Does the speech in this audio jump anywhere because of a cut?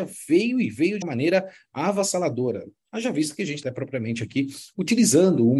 yes; 2 cuts; at 1.0 s, 3.6 s

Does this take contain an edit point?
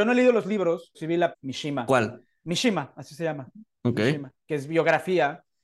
yes; 2 cuts; at 0.9 s, 1.3 s

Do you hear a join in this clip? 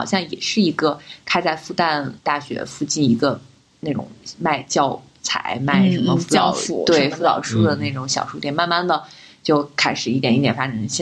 yes; 1 cut; at 2.2 s

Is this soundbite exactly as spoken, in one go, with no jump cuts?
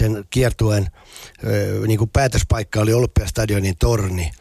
yes; 0 cuts

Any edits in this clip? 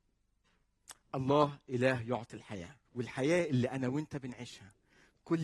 yes; 1 cut; at 2.8 s

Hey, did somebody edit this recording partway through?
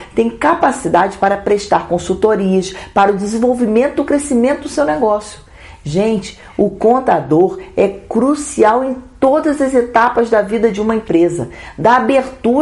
no; 0 cuts

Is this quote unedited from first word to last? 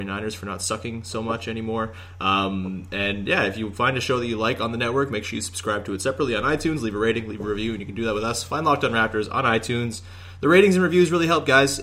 yes; 0 cuts

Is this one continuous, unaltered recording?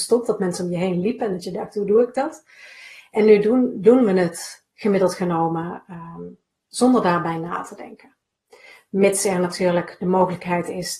yes; 0 cuts

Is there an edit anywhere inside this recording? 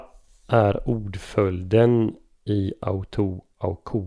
no; 0 cuts

